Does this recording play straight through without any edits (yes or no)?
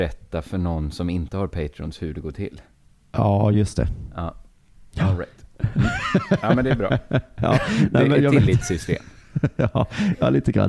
yes